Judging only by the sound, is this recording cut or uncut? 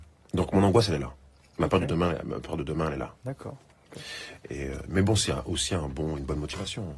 uncut